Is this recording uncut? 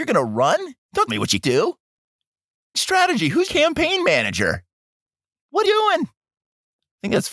no; 5 cuts; at 1.1 s, 1.4 s, 2.7 s, 3.4 s, 5.6 s

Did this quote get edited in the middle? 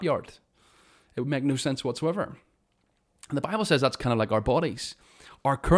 no; 0 cuts

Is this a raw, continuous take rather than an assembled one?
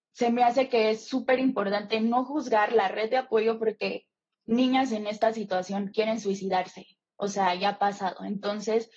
yes; 0 cuts

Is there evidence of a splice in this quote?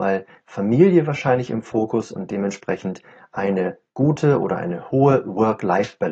no; 0 cuts

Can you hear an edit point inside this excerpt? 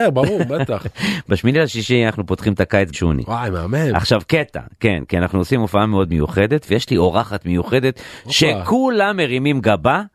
yes; 1 cut; at 2.9 s

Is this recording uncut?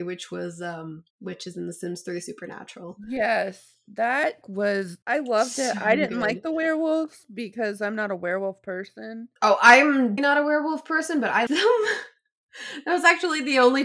no; 6 cuts; at 1.1 s, 4.4 s, 5.0 s, 9.4 s, 10.2 s, 11.5 s

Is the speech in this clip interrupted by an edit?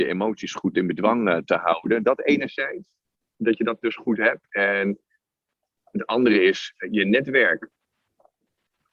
no; 0 cuts

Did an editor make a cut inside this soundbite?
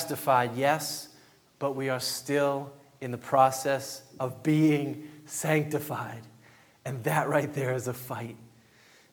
no; 0 cuts

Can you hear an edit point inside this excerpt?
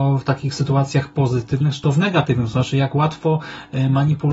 no; 0 cuts

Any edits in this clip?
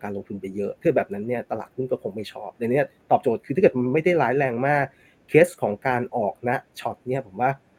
no; 0 cuts

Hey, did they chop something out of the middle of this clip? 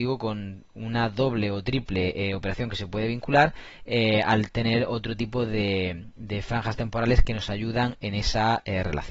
no; 0 cuts

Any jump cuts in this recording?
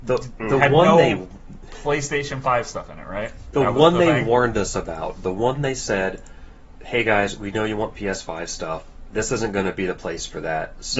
no; 0 cuts

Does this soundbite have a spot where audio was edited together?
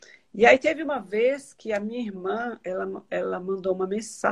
no; 0 cuts

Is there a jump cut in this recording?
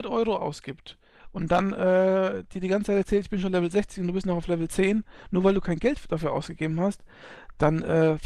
no; 0 cuts

